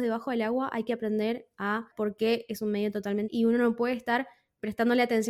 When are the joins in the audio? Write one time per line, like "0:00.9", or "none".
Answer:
0:01.9
0:03.3